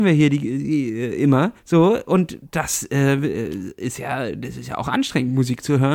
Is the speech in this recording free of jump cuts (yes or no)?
no